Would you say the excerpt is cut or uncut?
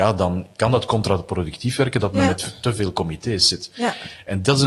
uncut